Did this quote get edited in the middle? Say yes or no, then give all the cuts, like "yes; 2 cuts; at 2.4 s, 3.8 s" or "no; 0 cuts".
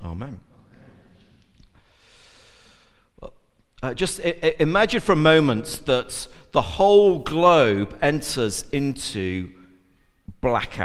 no; 0 cuts